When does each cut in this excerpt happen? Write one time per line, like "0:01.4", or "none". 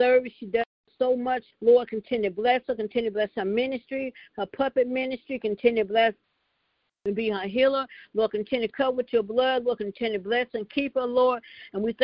0:01.5